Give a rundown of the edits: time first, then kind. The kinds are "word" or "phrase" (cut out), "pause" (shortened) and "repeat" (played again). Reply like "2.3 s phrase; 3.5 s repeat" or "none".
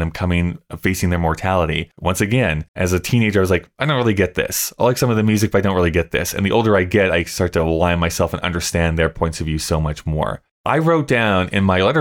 2.7 s pause